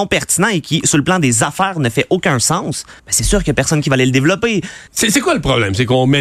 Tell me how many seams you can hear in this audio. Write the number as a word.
two